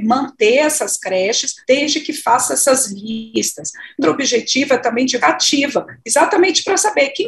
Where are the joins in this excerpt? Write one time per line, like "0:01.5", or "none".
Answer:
0:01.6
0:04.0
0:05.2